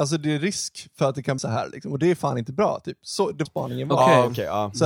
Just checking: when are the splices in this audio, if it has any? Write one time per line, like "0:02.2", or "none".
0:01.4
0:03.5